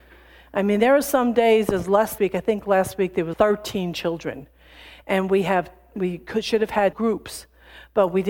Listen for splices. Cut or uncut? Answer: cut